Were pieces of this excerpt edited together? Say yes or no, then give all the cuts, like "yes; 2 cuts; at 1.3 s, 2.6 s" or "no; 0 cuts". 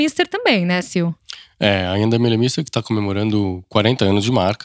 no; 0 cuts